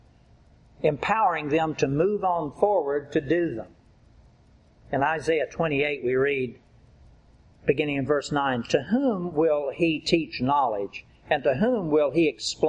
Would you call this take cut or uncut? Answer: uncut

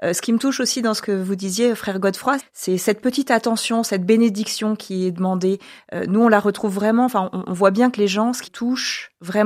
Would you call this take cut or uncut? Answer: cut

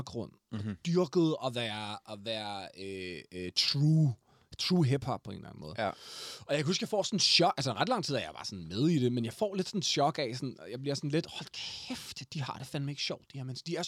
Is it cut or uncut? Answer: uncut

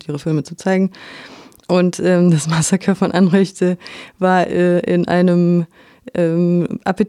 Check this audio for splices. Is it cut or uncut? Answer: uncut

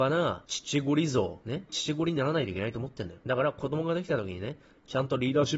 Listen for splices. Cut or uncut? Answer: uncut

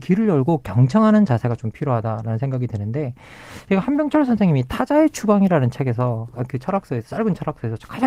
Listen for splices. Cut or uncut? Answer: uncut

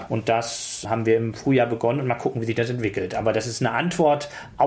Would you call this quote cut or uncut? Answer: uncut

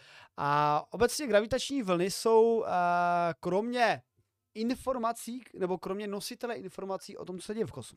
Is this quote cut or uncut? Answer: uncut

